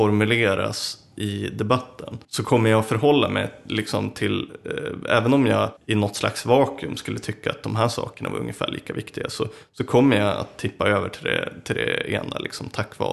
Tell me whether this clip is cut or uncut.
cut